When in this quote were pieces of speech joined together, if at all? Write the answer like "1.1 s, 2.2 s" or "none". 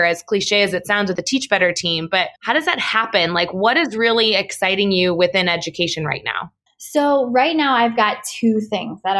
2.4 s, 6.7 s